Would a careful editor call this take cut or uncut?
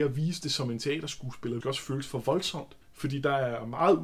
cut